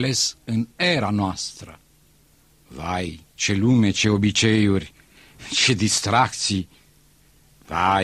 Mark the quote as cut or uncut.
cut